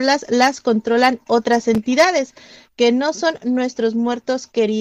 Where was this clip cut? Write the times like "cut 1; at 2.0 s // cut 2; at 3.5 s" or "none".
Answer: none